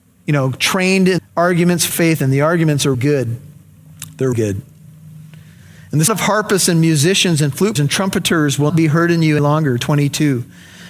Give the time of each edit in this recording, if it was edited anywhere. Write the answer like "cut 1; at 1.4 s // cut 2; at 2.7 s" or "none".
cut 1; at 1.2 s // cut 2; at 1.9 s // cut 3; at 2.9 s // cut 4; at 4.3 s // cut 5; at 6.1 s // cut 6; at 7.8 s // cut 7; at 8.7 s // cut 8; at 9.4 s